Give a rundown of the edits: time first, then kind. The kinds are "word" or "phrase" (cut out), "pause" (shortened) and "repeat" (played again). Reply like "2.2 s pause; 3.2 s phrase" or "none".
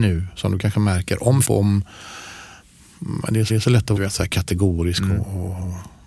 1.4 s word; 3.5 s repeat; 4.0 s word

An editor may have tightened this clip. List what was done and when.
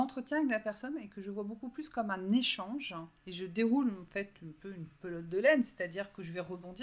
3.2 s pause

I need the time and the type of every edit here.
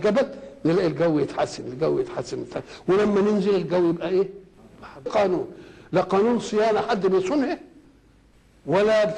5.1 s phrase

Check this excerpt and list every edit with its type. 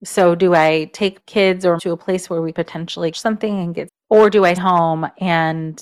1.2 s word; 1.8 s word; 2.5 s word; 3.1 s word; 3.9 s word; 4.6 s word

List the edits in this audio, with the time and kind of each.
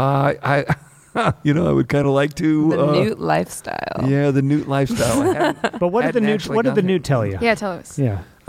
none

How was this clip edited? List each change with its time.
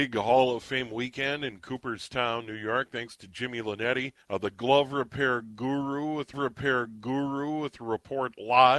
4.2 s pause; 6.3 s repeat

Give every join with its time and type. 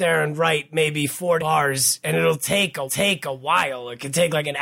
1.4 s word; 2.9 s repeat

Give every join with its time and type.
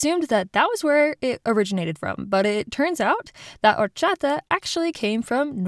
none

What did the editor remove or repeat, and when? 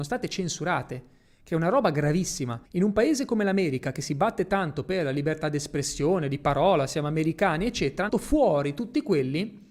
2.7 s pause; 8.1 s phrase

